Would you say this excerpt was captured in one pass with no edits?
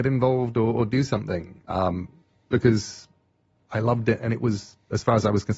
no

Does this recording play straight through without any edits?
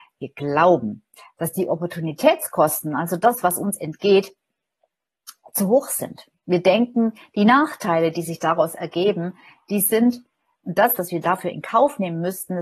yes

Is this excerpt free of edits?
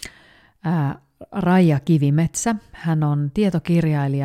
yes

